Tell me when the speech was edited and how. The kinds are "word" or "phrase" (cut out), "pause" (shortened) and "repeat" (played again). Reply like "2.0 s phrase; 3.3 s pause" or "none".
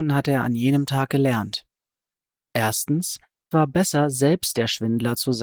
3.5 s word